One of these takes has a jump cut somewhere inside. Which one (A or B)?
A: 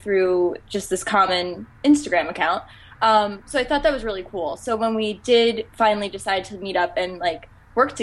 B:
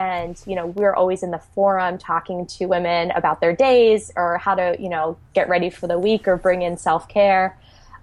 A